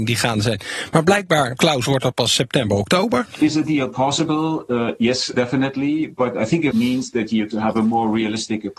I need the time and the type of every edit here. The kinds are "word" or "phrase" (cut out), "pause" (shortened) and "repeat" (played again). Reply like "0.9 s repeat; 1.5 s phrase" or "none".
1.6 s word; 5.3 s word; 6.7 s word; 7.5 s word